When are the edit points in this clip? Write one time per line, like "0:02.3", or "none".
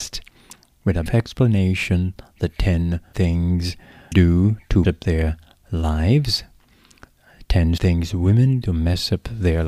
0:01.1
0:03.1
0:04.1
0:04.8
0:07.8
0:08.6